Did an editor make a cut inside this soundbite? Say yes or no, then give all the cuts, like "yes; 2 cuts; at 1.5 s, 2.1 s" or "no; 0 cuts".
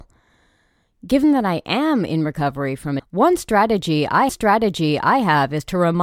yes; 2 cuts; at 3.0 s, 4.3 s